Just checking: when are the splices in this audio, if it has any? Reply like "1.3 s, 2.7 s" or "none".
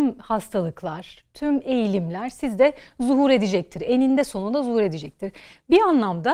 none